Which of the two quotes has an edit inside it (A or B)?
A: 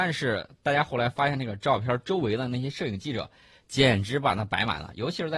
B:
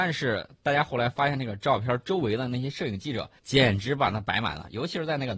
B